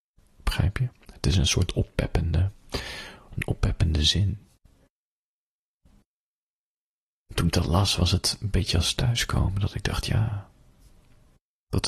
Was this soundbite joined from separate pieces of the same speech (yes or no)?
no